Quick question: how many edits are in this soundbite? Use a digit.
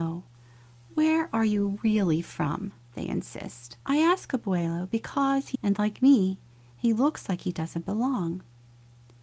2